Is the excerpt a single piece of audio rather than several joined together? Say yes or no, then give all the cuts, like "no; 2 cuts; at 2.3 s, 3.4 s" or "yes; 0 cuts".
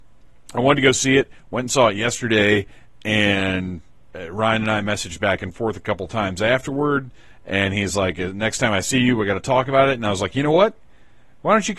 yes; 0 cuts